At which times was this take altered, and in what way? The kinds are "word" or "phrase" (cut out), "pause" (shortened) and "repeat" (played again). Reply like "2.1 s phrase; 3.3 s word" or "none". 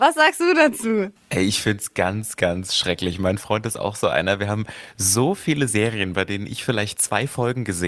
none